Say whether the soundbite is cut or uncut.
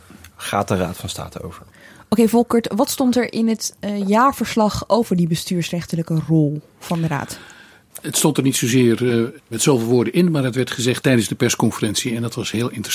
cut